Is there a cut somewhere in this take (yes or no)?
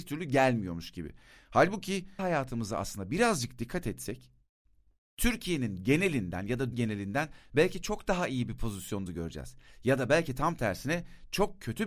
yes